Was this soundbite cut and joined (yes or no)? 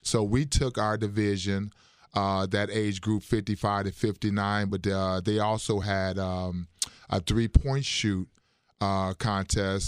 no